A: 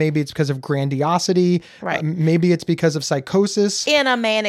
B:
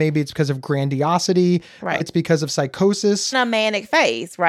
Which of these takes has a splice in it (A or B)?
B